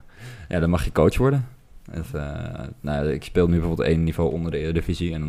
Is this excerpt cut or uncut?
uncut